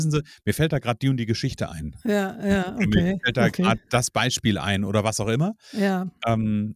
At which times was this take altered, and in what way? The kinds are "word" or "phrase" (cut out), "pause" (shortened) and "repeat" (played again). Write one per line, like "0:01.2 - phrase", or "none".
none